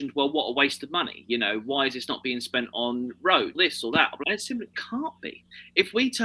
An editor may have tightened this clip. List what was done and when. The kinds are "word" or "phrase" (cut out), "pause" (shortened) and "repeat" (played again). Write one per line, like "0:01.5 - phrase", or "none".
0:03.5 - phrase
0:04.2 - word
0:04.7 - word